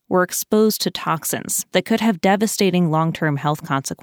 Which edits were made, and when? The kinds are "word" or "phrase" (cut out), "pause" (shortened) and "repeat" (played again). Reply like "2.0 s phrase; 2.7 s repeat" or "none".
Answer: none